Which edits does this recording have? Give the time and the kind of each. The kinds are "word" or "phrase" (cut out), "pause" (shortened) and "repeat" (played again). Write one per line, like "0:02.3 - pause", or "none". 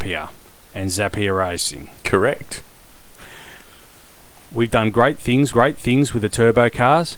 0:05.5 - repeat